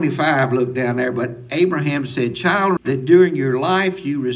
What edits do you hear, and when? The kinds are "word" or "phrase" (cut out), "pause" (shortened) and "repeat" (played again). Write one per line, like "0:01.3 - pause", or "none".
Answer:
0:02.8 - word